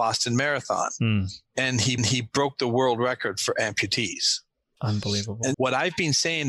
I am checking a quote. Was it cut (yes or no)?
yes